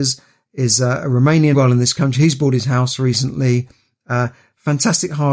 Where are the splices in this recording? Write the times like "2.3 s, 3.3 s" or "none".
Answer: 1.5 s